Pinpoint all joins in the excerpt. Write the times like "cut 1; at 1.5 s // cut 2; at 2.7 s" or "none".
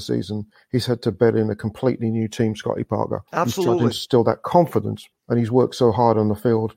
cut 1; at 3.3 s // cut 2; at 5.1 s